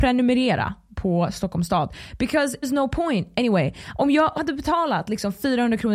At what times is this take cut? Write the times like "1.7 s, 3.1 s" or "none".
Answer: 2.6 s, 4.4 s